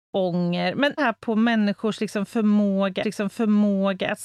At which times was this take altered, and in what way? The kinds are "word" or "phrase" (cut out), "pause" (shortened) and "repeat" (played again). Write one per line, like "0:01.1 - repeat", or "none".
0:01.0 - phrase
0:03.0 - repeat